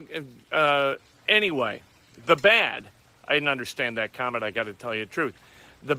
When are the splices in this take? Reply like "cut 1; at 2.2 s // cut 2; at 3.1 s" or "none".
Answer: none